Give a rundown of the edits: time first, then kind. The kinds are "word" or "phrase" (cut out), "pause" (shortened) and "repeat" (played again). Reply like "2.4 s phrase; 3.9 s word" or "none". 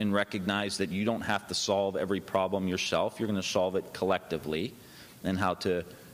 none